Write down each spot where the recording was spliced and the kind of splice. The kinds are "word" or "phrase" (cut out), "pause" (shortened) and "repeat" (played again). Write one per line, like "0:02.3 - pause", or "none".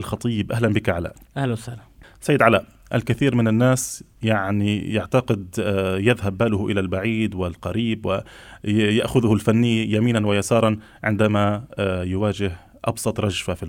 none